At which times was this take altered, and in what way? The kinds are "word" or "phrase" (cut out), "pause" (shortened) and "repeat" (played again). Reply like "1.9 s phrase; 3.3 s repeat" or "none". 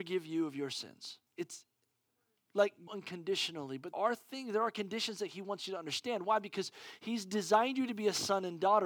1.3 s pause; 2.9 s phrase; 3.9 s word